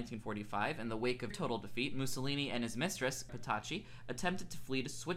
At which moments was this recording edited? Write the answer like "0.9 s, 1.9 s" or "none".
1.3 s, 3.3 s

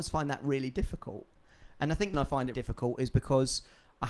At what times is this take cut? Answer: 2.1 s, 2.5 s

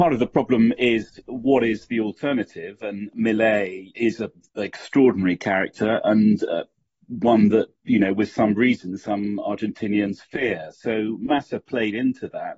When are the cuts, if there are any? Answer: none

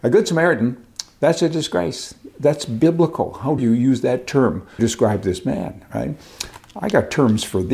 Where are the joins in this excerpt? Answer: 3.6 s, 4.8 s

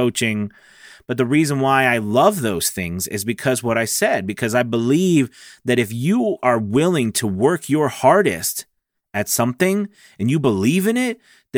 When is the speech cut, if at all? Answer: none

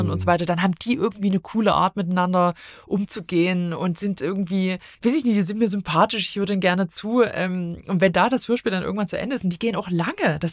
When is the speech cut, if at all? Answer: 4.9 s

